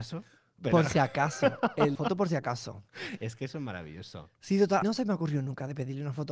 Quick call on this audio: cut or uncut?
cut